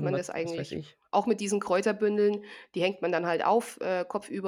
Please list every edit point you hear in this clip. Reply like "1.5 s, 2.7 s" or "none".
none